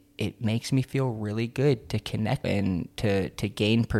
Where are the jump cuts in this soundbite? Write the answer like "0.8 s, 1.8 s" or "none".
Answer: 2.4 s